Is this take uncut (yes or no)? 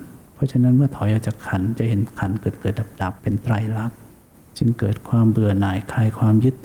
no